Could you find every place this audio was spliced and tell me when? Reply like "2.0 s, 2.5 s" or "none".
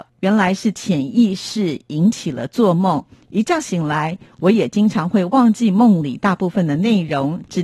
none